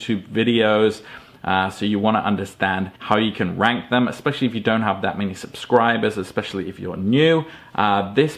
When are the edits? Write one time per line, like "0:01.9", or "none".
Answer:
0:02.9